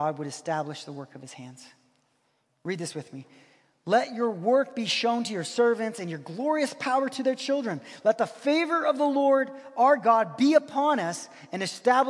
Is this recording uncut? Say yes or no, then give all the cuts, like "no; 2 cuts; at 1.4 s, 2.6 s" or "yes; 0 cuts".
yes; 0 cuts